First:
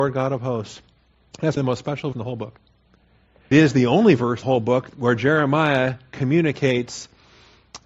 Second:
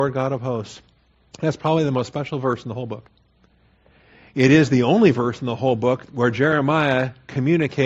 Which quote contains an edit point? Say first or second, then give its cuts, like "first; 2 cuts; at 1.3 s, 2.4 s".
first; 4 cuts; at 1.6 s, 2.1 s, 3.5 s, 4.4 s